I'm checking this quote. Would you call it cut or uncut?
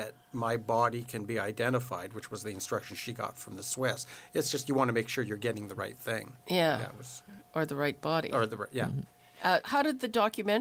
cut